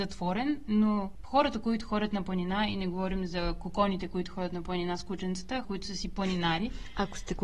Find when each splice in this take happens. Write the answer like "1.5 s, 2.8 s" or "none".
5.6 s